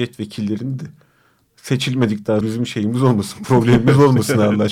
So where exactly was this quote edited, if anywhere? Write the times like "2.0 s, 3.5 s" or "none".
2.4 s